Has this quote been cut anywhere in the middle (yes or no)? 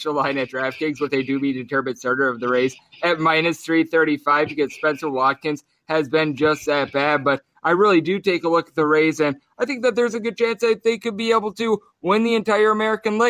no